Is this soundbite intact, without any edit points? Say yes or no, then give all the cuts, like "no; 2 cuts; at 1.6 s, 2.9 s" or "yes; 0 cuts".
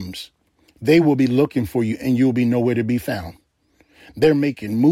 yes; 0 cuts